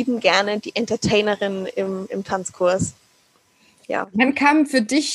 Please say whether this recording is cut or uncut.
uncut